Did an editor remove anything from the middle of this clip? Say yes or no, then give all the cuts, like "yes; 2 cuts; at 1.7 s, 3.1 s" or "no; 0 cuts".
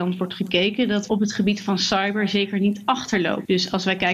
yes; 1 cut; at 1.1 s